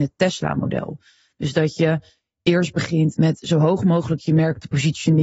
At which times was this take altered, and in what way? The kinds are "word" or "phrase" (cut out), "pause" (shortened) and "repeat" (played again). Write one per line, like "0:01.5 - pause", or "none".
none